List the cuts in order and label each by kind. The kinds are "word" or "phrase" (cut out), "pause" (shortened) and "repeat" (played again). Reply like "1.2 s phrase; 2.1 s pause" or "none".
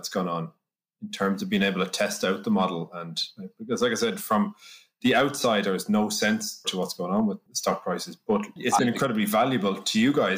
5.6 s phrase; 6.6 s word